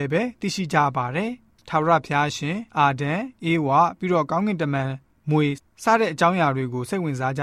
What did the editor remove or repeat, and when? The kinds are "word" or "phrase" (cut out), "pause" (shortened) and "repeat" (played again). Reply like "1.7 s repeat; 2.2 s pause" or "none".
2.7 s pause